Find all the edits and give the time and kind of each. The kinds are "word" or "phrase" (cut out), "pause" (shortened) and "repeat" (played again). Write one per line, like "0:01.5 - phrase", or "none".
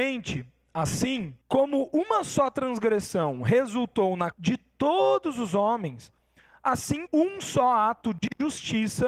0:01.4 - pause
0:04.3 - word
0:07.1 - word